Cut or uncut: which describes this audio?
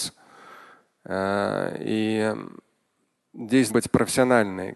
cut